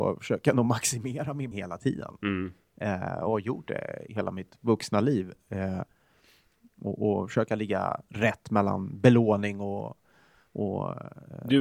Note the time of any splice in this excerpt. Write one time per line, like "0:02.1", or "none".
0:01.5
0:04.1